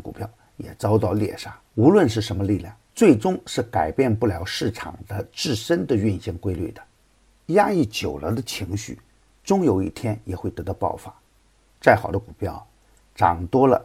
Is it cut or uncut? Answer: cut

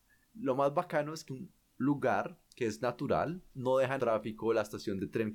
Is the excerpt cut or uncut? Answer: cut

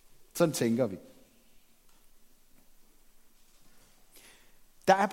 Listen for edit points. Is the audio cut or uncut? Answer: uncut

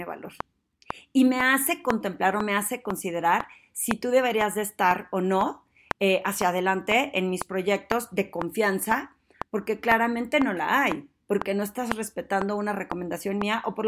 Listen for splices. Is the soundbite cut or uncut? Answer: uncut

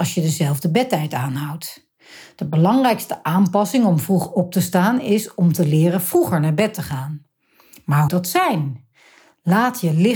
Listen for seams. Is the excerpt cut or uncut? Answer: cut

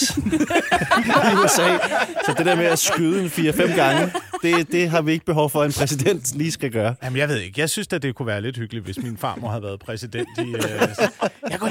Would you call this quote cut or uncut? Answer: uncut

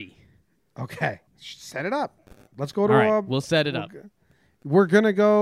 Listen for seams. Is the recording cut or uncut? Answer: cut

